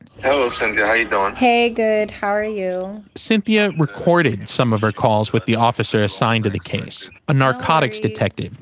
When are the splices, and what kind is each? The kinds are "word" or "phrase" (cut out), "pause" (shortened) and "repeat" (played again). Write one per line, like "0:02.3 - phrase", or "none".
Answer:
0:03.1 - pause
0:07.2 - pause